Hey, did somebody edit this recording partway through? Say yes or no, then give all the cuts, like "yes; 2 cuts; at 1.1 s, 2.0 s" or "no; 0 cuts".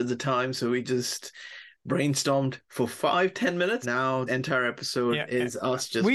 yes; 2 cuts; at 3.8 s, 4.3 s